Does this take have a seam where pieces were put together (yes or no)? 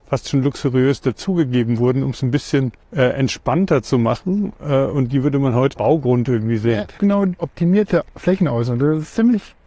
yes